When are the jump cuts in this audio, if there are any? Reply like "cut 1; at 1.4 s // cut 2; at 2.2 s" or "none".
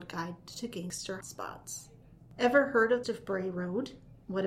cut 1; at 1.2 s // cut 2; at 3.0 s